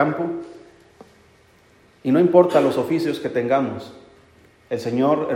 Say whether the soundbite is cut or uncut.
uncut